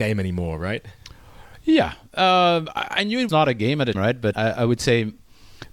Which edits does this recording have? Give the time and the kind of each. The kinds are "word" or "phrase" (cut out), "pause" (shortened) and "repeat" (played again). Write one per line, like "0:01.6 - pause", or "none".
0:03.3 - word
0:03.9 - word
0:04.3 - word

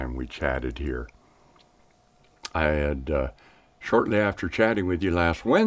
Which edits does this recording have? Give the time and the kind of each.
none

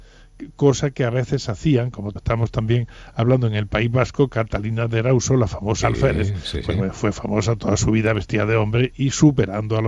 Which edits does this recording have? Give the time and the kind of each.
0:02.2 - word
0:05.8 - word
0:08.9 - word

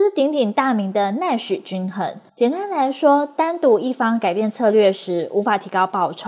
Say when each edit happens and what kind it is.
0:02.3 - pause

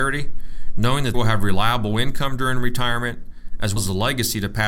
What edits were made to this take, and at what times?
0:01.1 - word
0:03.8 - word

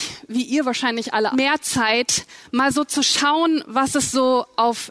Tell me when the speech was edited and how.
0:01.3 - phrase

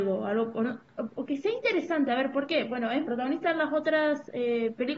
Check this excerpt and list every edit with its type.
0:03.0 - phrase

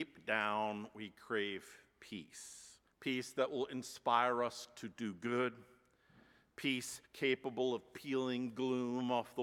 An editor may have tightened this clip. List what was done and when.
0:02.9 - pause
0:07.0 - pause

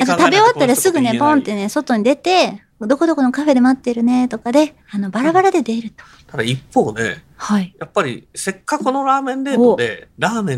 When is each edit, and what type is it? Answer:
0:02.7 - pause
0:04.8 - pause

